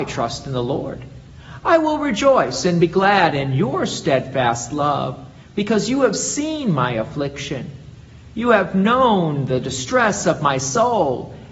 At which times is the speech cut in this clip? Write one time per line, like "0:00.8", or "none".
none